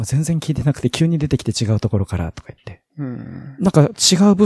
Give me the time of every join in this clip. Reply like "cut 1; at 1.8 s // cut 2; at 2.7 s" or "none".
cut 1; at 2.9 s